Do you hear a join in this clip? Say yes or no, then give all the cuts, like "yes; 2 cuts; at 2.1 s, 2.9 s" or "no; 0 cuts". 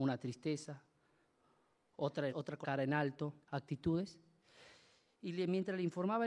yes; 3 cuts; at 2.3 s, 2.6 s, 3.4 s